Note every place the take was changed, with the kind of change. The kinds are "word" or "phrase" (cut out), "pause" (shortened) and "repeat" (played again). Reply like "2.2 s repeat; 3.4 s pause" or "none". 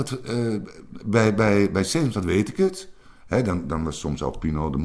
none